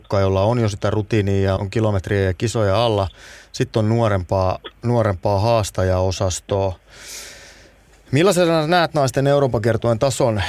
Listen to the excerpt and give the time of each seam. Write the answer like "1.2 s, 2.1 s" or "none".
1.6 s